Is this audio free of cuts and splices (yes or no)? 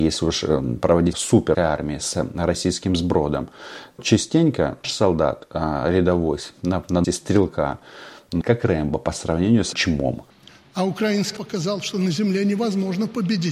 no